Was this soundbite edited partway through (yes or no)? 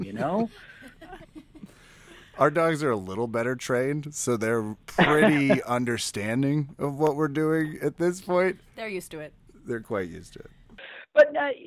yes